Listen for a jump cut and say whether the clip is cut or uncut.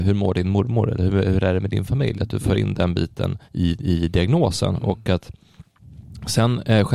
cut